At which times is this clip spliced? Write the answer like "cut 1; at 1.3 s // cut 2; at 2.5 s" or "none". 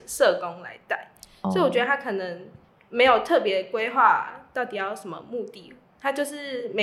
cut 1; at 2.7 s